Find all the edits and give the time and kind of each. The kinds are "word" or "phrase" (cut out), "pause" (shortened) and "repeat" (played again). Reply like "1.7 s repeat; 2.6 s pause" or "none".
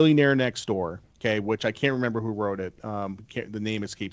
1.1 s pause